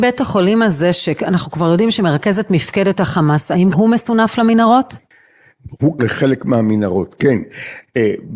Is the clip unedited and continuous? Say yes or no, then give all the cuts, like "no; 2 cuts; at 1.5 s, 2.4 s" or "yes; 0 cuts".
no; 2 cuts; at 3.7 s, 6.0 s